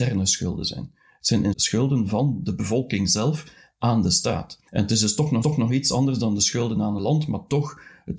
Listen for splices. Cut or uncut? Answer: cut